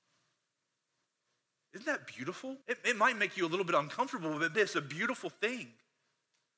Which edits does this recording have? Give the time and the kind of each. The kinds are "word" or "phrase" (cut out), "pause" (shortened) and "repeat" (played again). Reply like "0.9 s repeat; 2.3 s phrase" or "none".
2.6 s pause; 4.5 s word